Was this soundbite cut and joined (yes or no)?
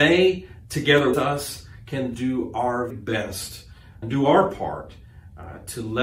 yes